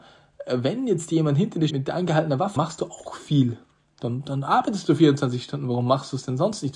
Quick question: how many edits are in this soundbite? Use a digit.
2